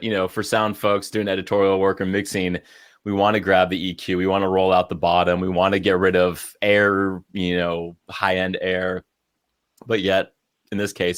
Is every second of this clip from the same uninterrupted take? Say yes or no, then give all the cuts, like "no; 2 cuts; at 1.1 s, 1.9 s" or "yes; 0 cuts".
no; 1 cut; at 8.0 s